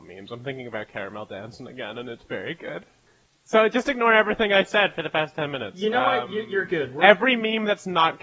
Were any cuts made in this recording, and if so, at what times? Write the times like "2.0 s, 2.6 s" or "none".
none